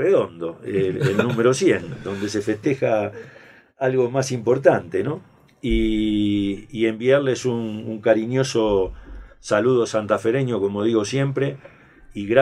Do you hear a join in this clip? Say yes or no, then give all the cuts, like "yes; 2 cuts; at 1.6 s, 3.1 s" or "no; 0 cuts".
no; 0 cuts